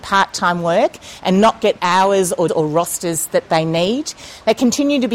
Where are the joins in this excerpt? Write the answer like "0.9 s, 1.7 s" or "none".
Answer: 1.8 s, 2.5 s